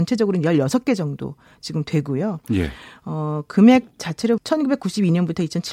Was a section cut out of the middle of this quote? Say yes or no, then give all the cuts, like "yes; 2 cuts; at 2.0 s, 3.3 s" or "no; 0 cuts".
yes; 1 cut; at 4.4 s